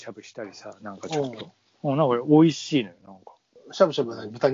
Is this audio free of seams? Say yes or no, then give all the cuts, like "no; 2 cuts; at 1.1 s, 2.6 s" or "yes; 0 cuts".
yes; 0 cuts